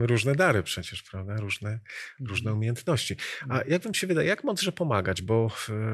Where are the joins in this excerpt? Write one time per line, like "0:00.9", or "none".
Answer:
none